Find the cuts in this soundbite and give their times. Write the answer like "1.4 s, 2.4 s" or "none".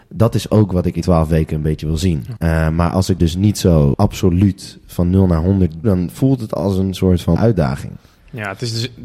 1.0 s, 3.2 s, 5.8 s, 7.4 s

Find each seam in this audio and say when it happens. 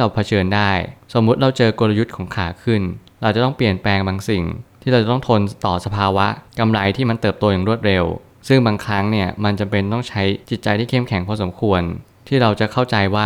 10.4 s

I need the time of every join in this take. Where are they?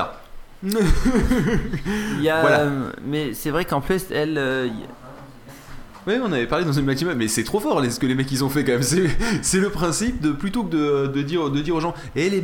none

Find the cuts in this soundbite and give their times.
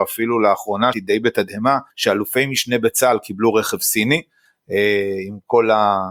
0.9 s, 1.9 s

